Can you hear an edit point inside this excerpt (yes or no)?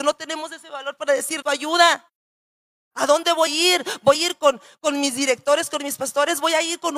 yes